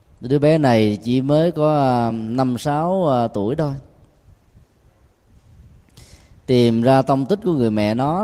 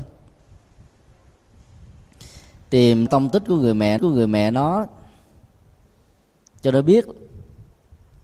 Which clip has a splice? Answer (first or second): second